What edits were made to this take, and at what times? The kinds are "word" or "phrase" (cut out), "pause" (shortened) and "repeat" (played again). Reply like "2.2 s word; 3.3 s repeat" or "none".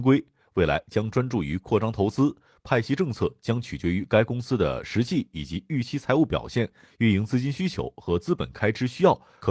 none

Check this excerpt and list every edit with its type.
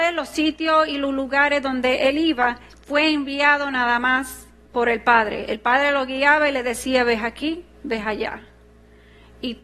2.7 s pause; 4.6 s pause

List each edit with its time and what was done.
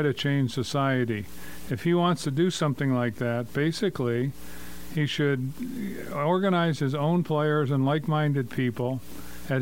none

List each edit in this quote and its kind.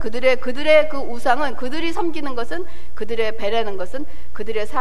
none

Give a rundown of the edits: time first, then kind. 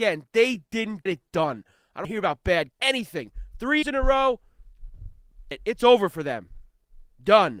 1.1 s word; 2.0 s word; 2.7 s word; 3.8 s word; 5.5 s word

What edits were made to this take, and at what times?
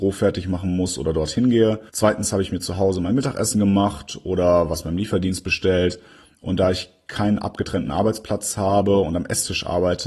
1.9 s pause

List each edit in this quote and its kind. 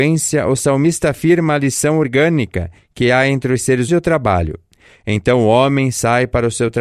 3.9 s word

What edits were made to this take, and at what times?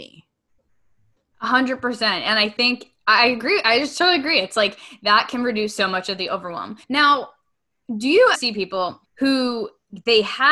6.8 s pause; 8.3 s word; 9.0 s pause

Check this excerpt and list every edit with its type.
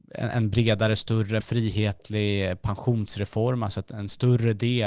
1.4 s word

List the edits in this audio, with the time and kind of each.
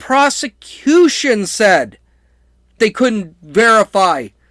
2.8 s word

